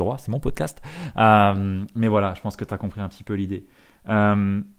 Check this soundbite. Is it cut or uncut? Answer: uncut